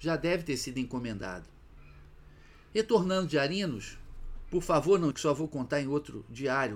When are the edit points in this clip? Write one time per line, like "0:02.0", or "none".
0:05.1